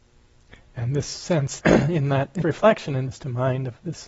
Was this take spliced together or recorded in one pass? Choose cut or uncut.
cut